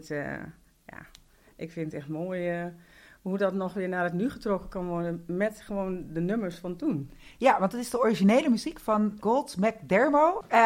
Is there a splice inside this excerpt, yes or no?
no